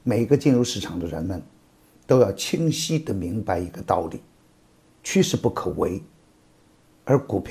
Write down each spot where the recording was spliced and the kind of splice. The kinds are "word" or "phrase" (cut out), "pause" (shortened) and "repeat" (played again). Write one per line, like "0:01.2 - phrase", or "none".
none